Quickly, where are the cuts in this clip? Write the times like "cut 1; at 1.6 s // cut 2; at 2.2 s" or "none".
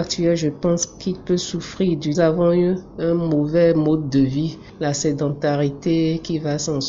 cut 1; at 2.1 s